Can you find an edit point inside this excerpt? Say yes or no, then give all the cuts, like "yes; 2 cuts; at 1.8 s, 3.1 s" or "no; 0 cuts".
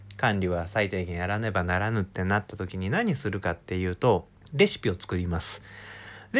yes; 1 cut; at 4.4 s